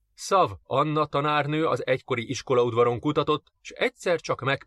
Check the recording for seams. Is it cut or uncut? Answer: uncut